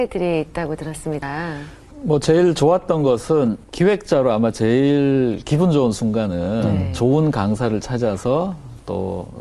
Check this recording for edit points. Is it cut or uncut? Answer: uncut